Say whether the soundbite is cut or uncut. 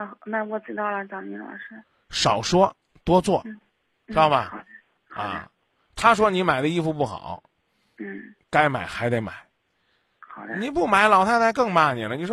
uncut